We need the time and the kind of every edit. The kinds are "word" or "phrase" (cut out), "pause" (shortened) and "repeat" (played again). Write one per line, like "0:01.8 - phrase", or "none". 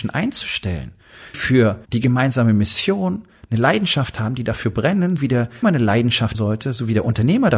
0:01.3 - word
0:01.8 - pause
0:05.2 - word
0:05.6 - word
0:06.3 - word